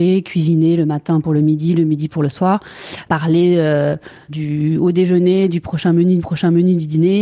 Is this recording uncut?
no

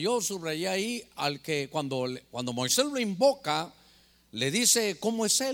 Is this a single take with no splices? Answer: yes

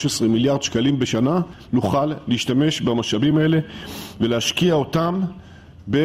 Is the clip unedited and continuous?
yes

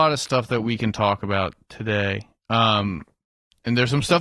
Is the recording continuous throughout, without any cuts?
yes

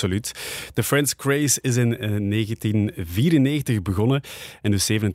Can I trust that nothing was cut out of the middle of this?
yes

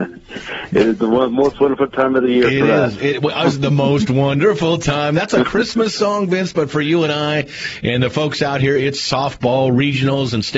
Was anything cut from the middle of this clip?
no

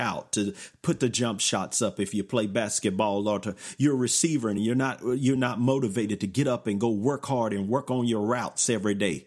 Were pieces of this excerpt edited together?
no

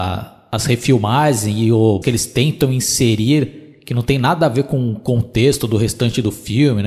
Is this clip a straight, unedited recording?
no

